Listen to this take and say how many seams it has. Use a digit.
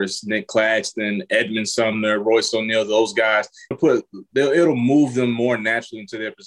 1